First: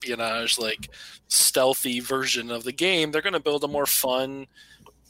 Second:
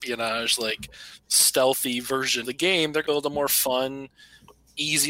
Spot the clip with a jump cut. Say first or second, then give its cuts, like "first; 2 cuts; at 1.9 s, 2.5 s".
second; 2 cuts; at 2.4 s, 3.0 s